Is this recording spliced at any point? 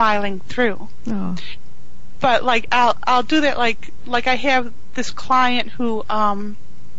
no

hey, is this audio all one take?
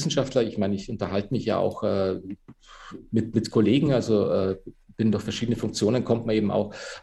yes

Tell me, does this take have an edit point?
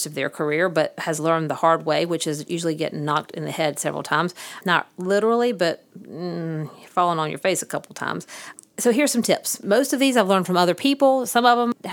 no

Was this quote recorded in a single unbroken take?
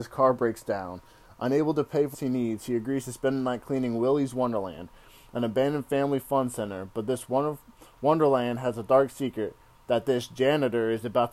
no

